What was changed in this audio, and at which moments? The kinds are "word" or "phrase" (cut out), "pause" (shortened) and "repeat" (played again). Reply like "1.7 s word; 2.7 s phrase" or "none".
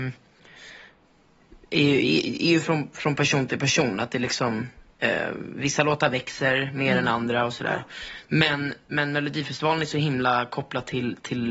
none